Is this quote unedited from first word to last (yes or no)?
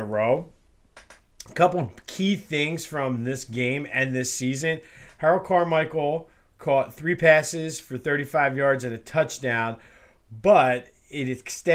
yes